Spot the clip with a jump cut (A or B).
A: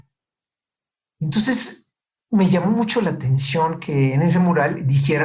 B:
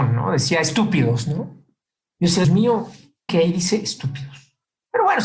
B